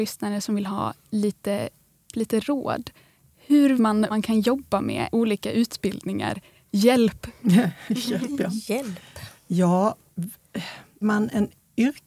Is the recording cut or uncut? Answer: cut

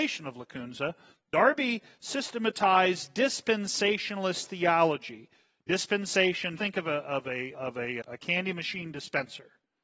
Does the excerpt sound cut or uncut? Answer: cut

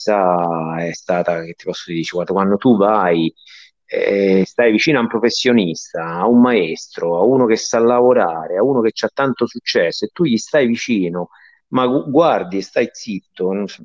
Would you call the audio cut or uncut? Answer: uncut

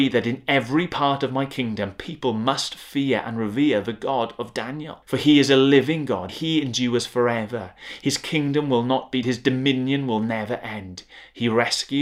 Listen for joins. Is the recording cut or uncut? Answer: cut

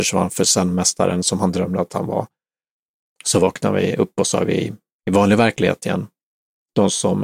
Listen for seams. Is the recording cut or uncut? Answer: uncut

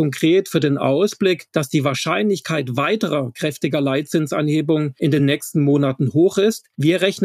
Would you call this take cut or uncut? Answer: uncut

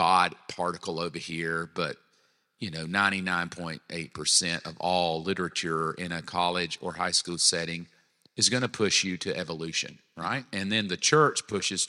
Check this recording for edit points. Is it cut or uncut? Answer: uncut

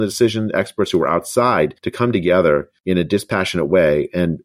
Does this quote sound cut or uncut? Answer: cut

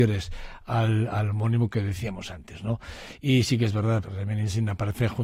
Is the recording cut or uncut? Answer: cut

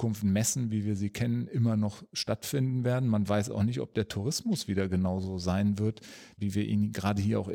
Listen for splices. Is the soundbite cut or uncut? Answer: uncut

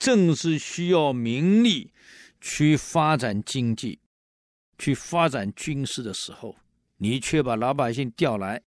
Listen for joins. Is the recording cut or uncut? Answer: uncut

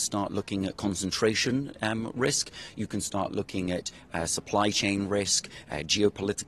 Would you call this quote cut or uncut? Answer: uncut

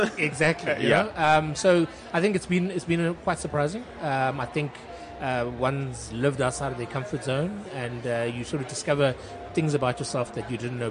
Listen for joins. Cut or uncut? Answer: uncut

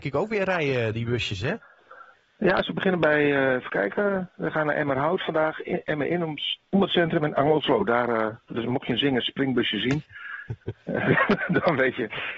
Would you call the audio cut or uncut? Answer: uncut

